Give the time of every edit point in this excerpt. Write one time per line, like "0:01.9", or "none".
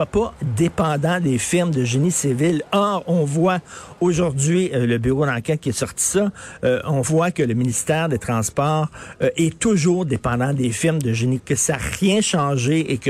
0:11.4